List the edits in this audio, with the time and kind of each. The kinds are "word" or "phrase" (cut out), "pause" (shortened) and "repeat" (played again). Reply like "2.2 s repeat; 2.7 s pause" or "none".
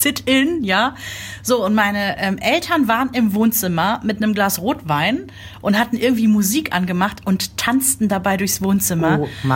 none